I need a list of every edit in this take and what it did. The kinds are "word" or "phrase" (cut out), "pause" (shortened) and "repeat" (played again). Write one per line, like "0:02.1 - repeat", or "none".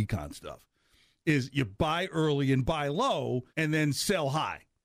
0:03.5 - pause